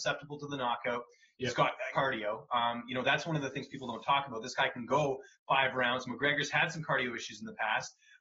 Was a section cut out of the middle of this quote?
yes; 1 cut; at 1.9 s

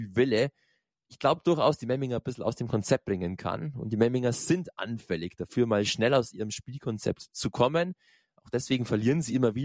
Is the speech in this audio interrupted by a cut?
no; 0 cuts

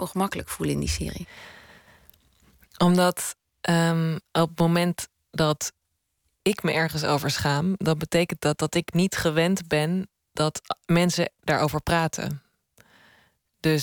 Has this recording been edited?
no; 0 cuts

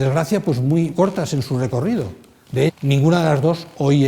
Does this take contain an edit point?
yes; 2 cuts; at 0.9 s, 2.7 s

